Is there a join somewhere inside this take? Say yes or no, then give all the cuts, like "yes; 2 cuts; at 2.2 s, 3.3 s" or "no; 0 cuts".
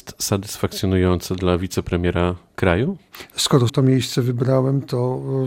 yes; 1 cut; at 3.7 s